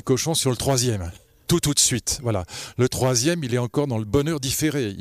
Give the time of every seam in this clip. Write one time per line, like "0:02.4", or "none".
none